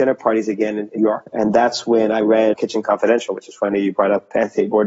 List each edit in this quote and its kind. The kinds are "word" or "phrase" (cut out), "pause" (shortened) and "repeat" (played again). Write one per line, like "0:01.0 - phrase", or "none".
0:01.0 - word
0:02.5 - word